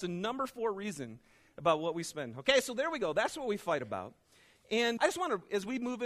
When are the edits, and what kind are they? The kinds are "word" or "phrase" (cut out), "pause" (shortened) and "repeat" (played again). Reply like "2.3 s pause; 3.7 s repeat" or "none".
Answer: 5.0 s word